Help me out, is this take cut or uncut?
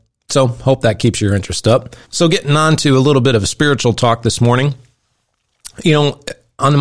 cut